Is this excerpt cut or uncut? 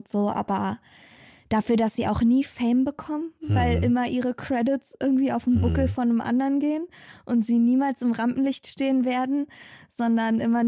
uncut